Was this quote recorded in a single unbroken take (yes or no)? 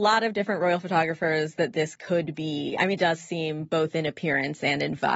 no